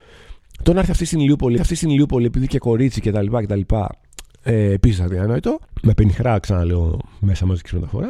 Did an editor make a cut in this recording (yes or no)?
yes